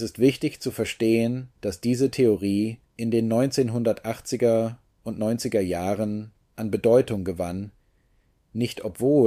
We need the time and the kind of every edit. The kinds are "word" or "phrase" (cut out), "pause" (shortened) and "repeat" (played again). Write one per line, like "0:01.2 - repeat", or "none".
0:01.5 - pause
0:02.9 - pause